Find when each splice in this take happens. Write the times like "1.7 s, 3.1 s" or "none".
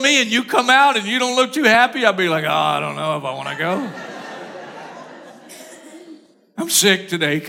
none